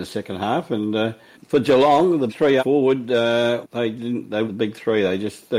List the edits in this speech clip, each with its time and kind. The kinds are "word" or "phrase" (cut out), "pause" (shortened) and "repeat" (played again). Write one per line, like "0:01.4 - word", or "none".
0:01.3 - word
0:02.3 - word
0:02.6 - word
0:03.6 - word
0:04.4 - word